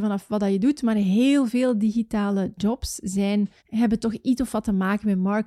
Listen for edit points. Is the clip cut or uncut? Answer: cut